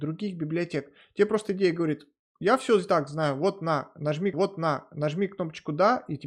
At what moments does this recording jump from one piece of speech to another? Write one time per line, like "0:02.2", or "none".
0:04.3

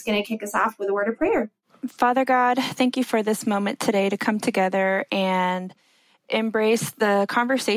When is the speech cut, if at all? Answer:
none

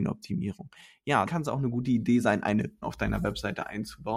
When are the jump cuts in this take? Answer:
0:01.3
0:02.8

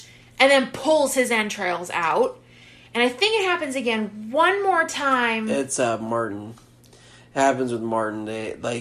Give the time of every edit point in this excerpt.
none

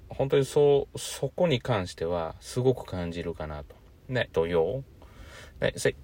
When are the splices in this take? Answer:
0:04.3

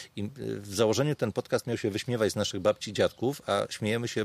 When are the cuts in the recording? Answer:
none

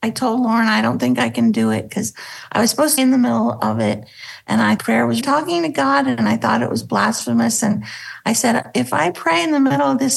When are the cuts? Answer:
0:03.0
0:04.8
0:05.2

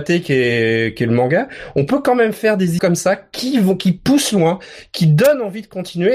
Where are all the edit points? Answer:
0:02.8

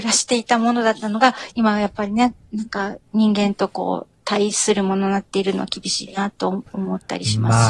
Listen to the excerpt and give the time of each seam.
0:03.1

